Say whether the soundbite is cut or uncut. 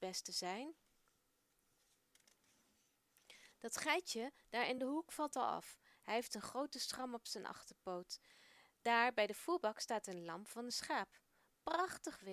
uncut